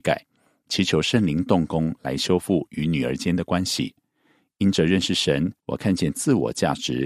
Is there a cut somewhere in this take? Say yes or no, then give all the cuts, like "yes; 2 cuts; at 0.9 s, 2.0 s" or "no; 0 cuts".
yes; 1 cut; at 5.6 s